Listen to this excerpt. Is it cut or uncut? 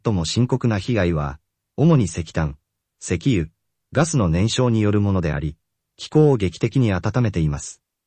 uncut